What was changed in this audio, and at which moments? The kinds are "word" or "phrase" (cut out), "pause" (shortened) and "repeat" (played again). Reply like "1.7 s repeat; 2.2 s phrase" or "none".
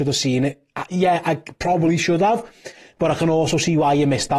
none